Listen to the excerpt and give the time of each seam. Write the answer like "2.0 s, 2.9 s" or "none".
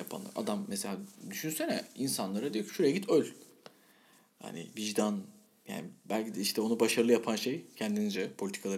none